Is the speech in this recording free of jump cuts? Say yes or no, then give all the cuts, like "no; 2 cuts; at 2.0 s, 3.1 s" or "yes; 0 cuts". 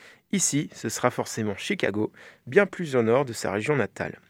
yes; 0 cuts